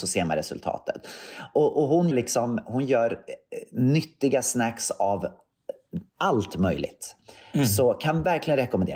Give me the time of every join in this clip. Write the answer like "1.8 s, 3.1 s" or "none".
2.1 s, 6.1 s